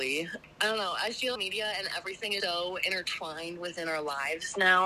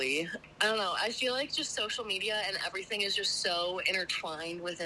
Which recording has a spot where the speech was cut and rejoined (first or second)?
first